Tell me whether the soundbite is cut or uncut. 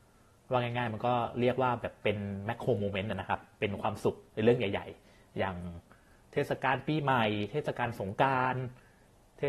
uncut